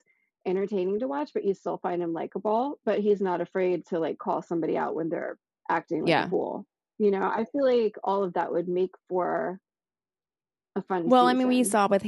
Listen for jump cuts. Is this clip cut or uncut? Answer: uncut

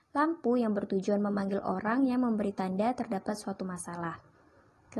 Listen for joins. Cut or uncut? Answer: uncut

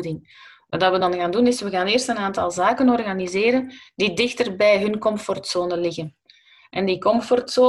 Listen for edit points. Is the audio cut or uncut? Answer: uncut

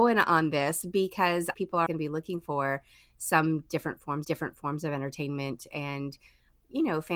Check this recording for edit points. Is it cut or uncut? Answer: cut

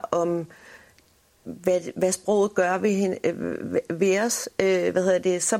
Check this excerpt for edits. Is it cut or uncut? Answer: uncut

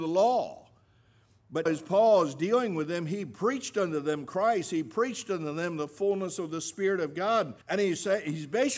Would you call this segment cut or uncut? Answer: cut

